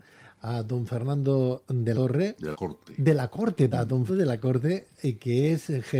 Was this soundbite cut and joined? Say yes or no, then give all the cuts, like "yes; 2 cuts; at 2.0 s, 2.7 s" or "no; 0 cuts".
yes; 4 cuts; at 1.9 s, 2.5 s, 3.7 s, 4.1 s